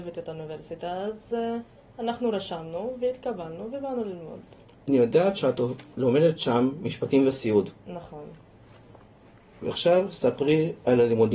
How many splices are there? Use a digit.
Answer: 0